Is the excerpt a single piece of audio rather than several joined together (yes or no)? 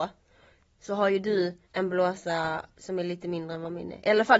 no